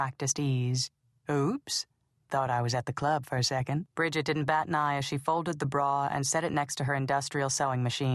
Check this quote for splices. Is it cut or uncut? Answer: cut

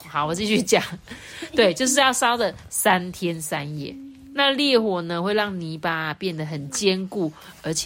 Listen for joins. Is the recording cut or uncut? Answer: uncut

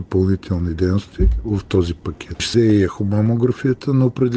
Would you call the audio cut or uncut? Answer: cut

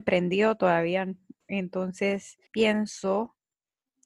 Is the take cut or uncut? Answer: cut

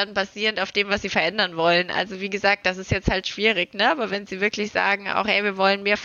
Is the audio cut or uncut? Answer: uncut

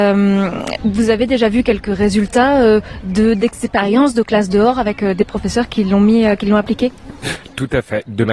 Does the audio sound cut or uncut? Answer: uncut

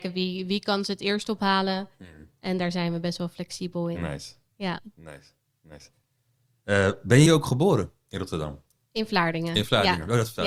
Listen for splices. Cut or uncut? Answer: cut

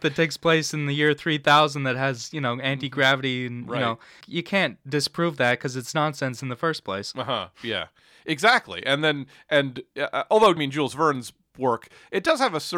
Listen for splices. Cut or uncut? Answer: cut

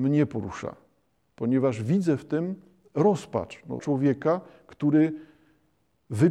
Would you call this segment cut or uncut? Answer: cut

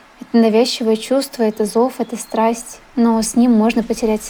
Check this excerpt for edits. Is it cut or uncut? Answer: uncut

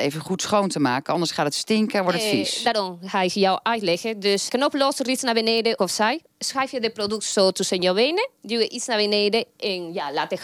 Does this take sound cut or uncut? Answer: cut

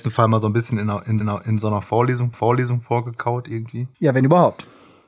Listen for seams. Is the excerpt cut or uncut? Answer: cut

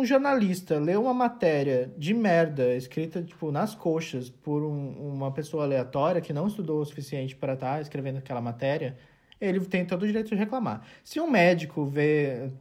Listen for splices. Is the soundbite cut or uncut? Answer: uncut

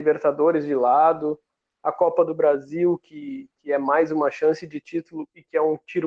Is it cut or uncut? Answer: uncut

